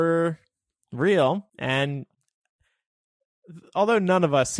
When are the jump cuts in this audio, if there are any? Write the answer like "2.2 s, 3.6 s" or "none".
1.5 s